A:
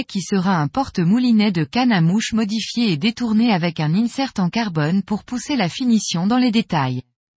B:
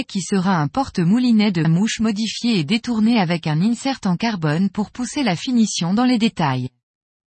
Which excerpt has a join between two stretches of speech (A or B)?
B